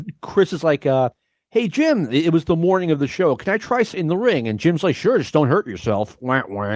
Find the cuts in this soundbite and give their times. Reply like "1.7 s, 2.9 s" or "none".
3.9 s

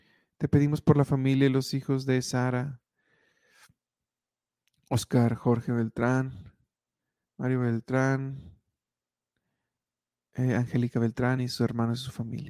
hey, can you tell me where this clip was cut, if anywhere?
none

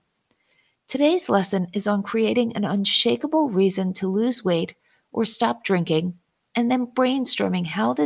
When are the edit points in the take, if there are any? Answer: none

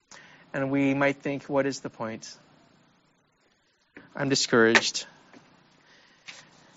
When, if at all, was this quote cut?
none

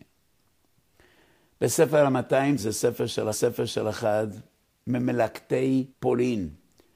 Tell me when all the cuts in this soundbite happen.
2.6 s, 3.3 s, 5.9 s

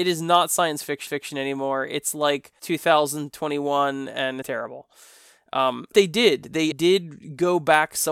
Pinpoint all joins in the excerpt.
1.1 s, 2.6 s, 4.4 s, 5.9 s, 6.7 s

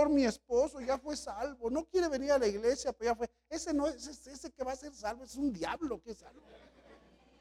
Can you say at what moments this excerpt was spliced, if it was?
none

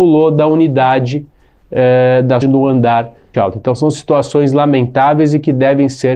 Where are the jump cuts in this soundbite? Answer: 2.4 s, 3.3 s

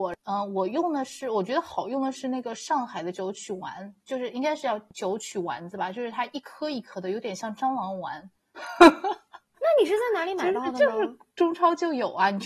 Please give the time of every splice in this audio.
9.5 s

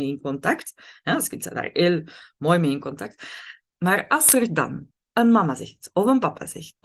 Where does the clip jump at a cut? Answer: none

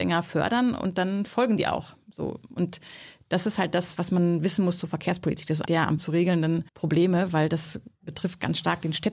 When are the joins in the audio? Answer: 5.7 s, 6.0 s, 6.7 s

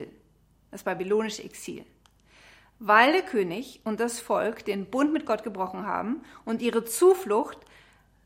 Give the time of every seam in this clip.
none

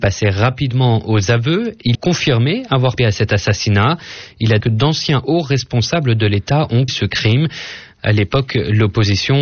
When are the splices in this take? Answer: 1.9 s, 3.0 s, 4.6 s, 6.9 s

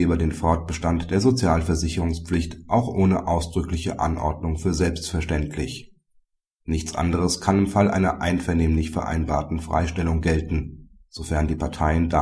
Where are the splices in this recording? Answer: none

